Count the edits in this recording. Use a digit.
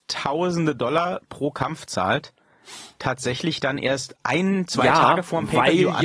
0